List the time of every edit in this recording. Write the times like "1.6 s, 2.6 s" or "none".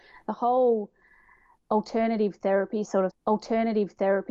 3.1 s